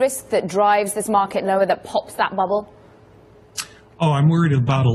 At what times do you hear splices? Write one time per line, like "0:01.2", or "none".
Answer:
none